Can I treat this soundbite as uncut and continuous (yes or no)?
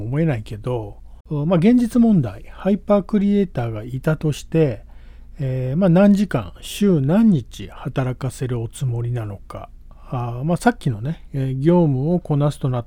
no